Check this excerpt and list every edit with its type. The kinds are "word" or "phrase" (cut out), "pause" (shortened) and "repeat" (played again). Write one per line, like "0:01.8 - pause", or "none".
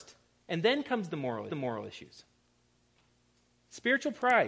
0:01.5 - repeat